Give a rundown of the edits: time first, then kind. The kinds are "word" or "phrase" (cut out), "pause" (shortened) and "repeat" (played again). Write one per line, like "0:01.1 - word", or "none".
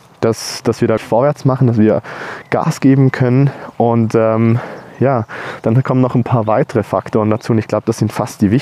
0:01.0 - word